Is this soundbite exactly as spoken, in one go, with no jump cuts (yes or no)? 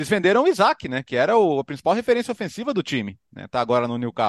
yes